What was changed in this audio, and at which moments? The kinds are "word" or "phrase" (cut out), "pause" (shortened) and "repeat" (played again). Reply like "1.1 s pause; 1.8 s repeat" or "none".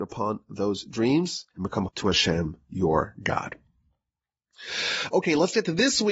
1.5 s pause; 1.9 s word

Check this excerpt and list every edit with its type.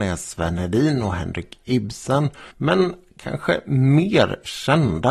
2.5 s pause

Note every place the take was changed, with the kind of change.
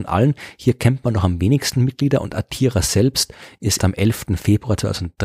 3.8 s word

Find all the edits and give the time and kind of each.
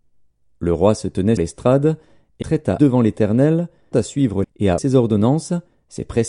1.4 s word; 2.4 s word; 2.8 s word; 3.9 s word; 4.4 s word; 4.8 s word

